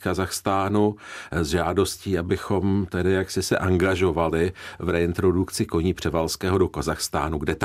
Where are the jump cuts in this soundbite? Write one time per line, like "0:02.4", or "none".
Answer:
none